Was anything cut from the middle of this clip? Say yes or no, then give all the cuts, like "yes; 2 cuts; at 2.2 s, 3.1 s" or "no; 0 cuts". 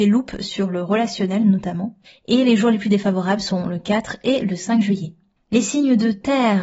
yes; 2 cuts; at 2.1 s, 5.4 s